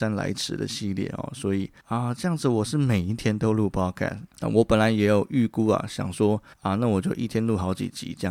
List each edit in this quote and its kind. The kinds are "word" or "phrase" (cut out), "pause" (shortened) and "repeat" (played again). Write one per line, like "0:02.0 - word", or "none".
0:01.8 - pause
0:04.3 - pause
0:06.5 - pause